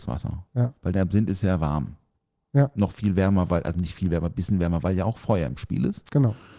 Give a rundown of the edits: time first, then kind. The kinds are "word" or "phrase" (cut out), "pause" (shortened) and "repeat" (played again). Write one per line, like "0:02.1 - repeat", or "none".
none